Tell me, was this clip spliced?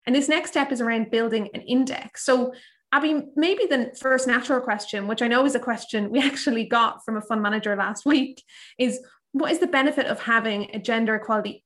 no; 0 cuts

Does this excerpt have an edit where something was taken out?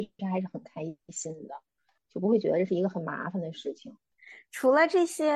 no; 0 cuts

